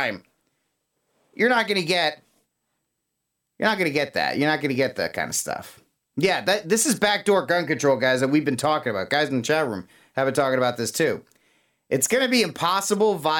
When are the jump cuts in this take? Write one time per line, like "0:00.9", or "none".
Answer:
none

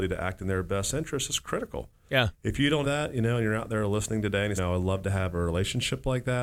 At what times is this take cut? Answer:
0:02.8
0:04.6

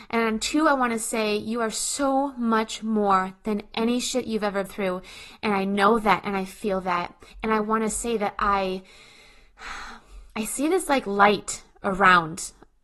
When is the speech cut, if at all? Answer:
0:04.7
0:07.3
0:10.3

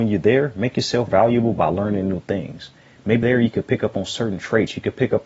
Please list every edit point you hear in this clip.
0:01.1
0:03.2

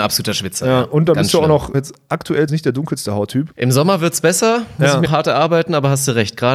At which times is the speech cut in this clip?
0:01.7
0:02.5
0:03.5
0:05.0

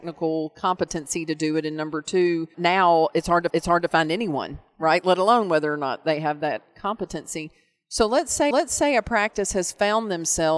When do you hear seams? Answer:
0:02.5
0:03.5
0:08.5

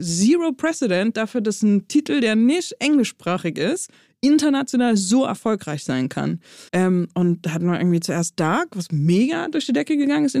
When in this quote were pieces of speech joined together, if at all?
0:06.7

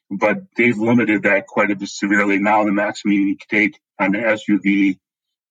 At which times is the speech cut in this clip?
0:03.9

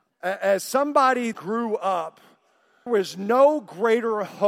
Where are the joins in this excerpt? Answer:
0:01.3
0:02.9

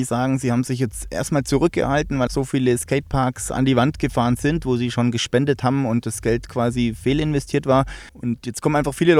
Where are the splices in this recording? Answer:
0:02.3
0:08.1

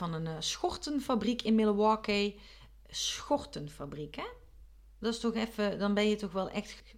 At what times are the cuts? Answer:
none

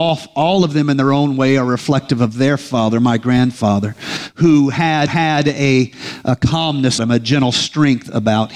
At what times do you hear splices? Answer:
0:05.1
0:07.0

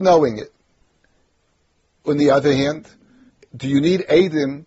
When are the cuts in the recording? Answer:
0:03.3

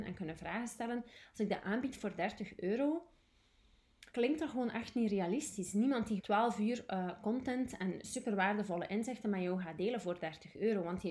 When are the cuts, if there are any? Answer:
0:04.1
0:06.2

